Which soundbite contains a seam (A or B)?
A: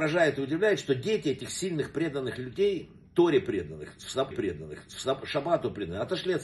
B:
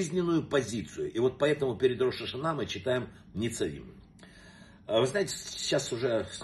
A